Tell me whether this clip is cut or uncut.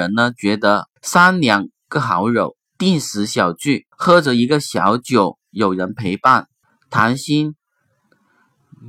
cut